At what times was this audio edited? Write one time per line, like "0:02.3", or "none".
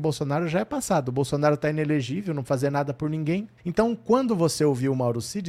0:02.4
0:03.6